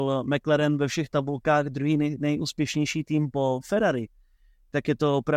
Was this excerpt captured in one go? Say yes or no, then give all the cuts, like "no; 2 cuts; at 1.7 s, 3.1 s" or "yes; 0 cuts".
yes; 0 cuts